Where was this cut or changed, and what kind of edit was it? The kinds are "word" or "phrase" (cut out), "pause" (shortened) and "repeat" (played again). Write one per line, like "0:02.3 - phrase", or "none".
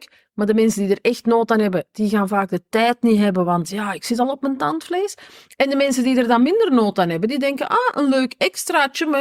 none